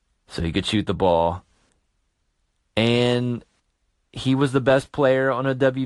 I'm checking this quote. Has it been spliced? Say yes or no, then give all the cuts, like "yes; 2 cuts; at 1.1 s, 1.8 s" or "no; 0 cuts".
no; 0 cuts